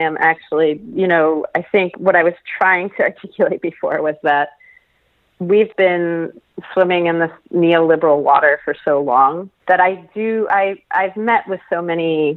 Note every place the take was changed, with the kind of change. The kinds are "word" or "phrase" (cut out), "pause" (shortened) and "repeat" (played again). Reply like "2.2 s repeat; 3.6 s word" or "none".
5.7 s word; 9.6 s pause